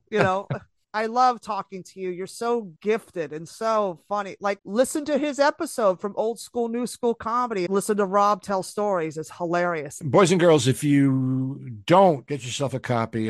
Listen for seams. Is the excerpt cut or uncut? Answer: cut